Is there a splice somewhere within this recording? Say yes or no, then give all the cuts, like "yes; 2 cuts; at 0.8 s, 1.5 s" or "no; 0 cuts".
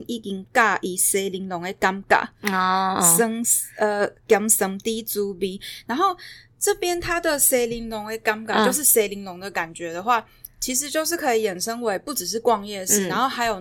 no; 0 cuts